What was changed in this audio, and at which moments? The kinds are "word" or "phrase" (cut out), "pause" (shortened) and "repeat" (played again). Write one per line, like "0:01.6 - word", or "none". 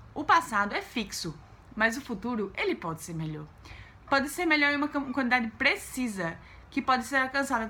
none